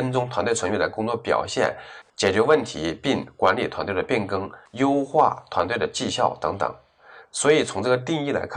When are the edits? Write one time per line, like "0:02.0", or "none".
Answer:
0:02.1